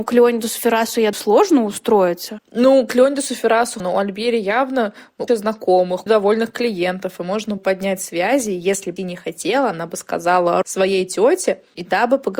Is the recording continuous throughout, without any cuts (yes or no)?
no